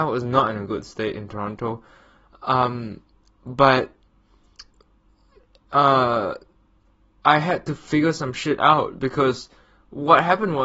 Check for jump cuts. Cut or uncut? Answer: uncut